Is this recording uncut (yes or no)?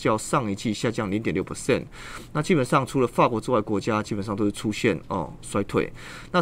yes